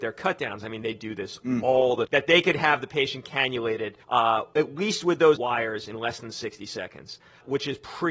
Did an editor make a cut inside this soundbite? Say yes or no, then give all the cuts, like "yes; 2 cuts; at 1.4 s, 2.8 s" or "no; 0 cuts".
yes; 3 cuts; at 2.1 s, 4.0 s, 5.4 s